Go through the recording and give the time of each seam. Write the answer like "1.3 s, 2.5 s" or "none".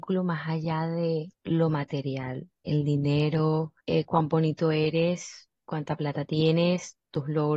1.3 s, 3.8 s